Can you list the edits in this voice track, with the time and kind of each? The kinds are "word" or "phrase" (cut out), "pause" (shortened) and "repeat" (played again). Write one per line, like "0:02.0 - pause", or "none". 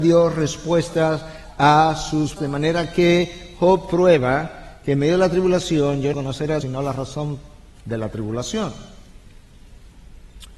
0:02.4 - word
0:06.1 - word
0:06.6 - word